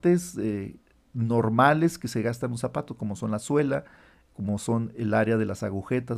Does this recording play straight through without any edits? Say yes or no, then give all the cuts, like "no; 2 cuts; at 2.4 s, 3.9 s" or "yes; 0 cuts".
yes; 0 cuts